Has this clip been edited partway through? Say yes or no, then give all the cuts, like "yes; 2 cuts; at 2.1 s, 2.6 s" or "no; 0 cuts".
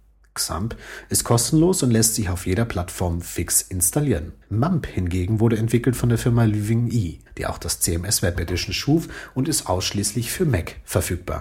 yes; 2 cuts; at 4.4 s, 7.3 s